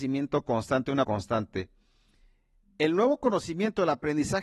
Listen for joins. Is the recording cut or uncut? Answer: cut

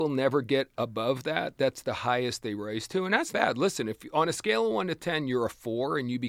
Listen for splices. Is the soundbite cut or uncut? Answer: cut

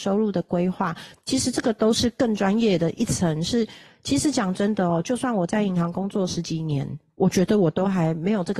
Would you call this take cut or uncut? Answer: uncut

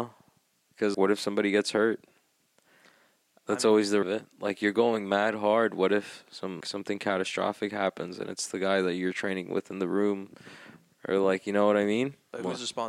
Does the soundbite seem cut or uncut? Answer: cut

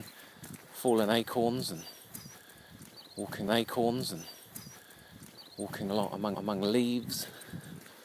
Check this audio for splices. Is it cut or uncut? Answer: cut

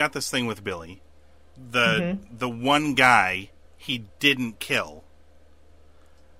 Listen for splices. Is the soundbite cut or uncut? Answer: uncut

